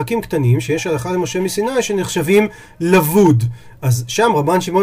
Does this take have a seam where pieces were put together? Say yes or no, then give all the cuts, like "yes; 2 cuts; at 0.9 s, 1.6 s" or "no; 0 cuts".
no; 0 cuts